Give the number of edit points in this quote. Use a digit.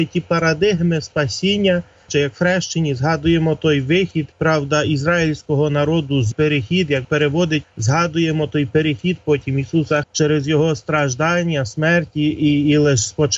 6